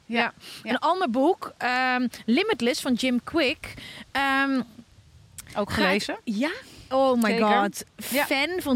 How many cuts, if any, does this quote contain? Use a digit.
0